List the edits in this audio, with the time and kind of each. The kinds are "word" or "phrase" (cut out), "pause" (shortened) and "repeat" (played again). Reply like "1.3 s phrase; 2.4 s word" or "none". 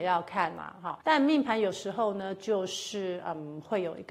1.0 s pause